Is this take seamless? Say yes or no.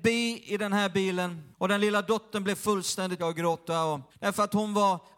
no